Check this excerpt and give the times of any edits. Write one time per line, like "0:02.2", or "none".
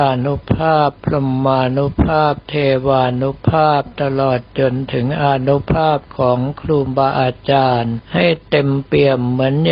0:08.0